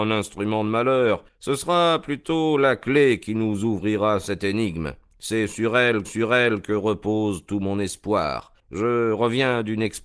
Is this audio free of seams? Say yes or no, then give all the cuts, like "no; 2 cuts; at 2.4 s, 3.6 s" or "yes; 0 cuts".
no; 3 cuts; at 1.3 s, 6.0 s, 8.6 s